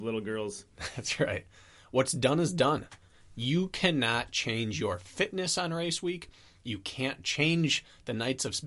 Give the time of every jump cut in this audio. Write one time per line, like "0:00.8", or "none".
none